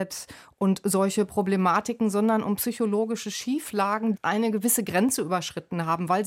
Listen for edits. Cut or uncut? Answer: cut